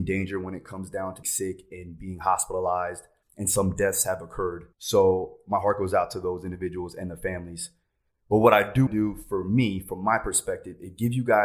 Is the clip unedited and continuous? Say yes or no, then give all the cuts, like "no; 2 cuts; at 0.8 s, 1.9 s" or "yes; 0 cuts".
no; 3 cuts; at 1.2 s, 4.7 s, 8.9 s